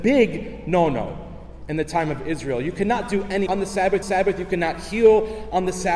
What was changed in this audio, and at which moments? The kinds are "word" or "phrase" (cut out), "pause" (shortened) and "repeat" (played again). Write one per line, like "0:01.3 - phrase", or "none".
0:03.5 - word
0:04.0 - repeat